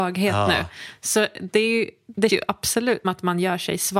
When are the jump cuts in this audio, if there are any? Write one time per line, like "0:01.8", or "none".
0:02.3
0:03.0